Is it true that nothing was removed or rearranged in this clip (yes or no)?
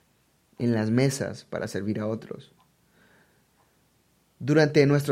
yes